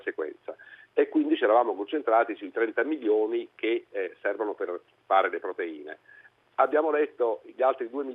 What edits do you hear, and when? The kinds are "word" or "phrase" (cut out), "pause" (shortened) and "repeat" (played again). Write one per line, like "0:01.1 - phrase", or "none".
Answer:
none

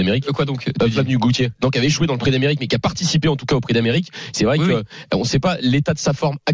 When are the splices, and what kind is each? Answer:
none

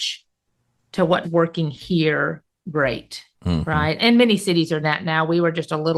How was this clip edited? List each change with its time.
0:01.2 - word
0:03.3 - pause
0:04.0 - word
0:04.8 - word

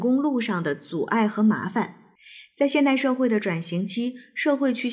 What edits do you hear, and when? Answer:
none

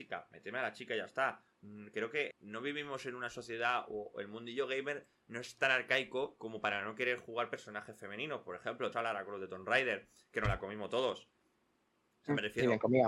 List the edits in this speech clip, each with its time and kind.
0:02.3 - word
0:08.9 - word

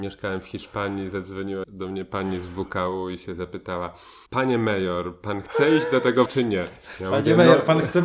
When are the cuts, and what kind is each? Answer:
0:01.6 - word
0:04.3 - pause
0:06.3 - word

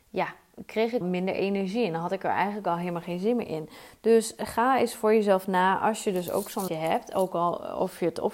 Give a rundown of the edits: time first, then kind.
0:01.0 - word
0:06.7 - word

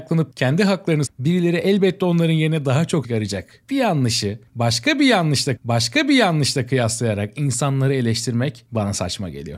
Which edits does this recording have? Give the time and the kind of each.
0:01.1 - phrase
0:03.0 - word
0:05.6 - repeat

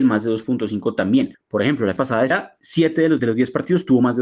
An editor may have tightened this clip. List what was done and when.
0:02.0 - word
0:02.3 - word
0:03.2 - word

